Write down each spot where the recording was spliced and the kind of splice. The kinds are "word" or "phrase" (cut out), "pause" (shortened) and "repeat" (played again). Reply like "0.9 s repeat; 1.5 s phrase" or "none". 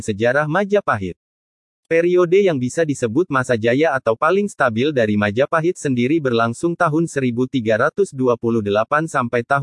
none